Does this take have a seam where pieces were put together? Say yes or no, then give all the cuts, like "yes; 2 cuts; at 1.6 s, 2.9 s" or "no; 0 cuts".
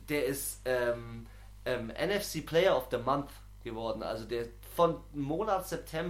no; 0 cuts